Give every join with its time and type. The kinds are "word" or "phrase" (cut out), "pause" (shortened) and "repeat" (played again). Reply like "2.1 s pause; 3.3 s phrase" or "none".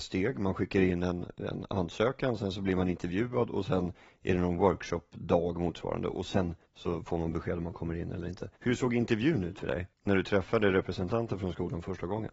6.6 s pause; 8.6 s pause; 9.9 s pause